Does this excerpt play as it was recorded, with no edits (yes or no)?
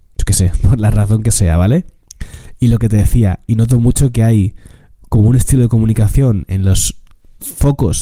yes